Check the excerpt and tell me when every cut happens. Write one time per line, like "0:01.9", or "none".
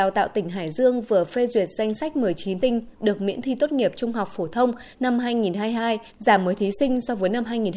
0:02.6
0:04.9
0:06.1